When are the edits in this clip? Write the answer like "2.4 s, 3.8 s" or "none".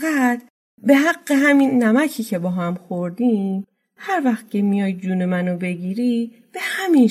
none